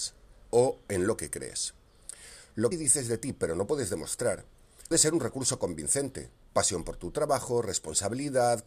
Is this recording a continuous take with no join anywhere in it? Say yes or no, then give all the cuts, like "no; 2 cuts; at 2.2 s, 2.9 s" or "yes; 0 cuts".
no; 2 cuts; at 2.7 s, 4.9 s